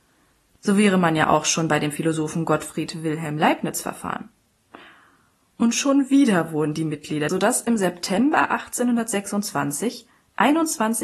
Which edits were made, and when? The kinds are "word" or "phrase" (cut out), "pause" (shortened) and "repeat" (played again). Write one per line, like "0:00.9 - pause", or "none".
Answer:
0:07.3 - phrase